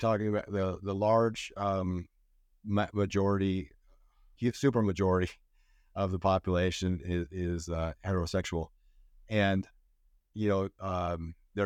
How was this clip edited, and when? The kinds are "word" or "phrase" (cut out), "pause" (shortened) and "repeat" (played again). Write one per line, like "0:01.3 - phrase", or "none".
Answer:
0:04.4 - word